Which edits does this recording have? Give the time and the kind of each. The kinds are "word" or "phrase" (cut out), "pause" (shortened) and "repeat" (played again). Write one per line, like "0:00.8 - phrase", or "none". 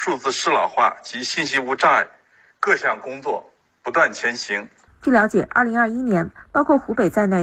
none